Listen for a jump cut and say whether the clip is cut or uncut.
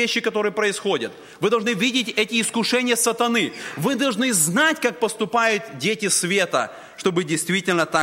uncut